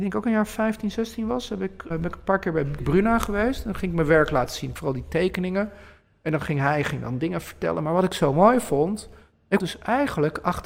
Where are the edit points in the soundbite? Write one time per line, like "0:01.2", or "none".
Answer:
0:01.9
0:02.8
0:09.6